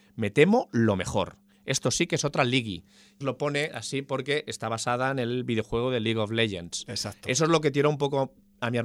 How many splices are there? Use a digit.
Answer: 1